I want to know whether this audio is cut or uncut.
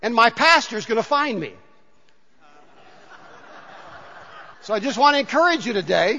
cut